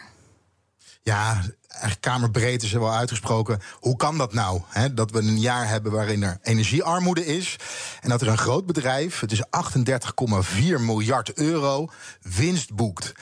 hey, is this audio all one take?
yes; 0 cuts

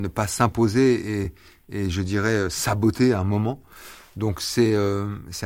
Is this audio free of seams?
yes; 0 cuts

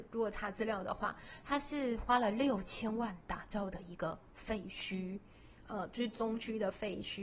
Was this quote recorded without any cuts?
yes; 0 cuts

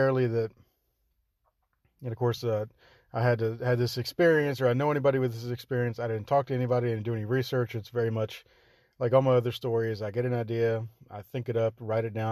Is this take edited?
no; 0 cuts

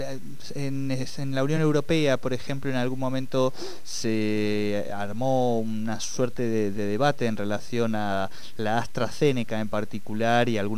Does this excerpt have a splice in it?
no; 0 cuts

